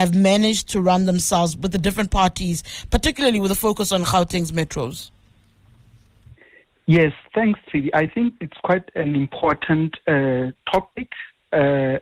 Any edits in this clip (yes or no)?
no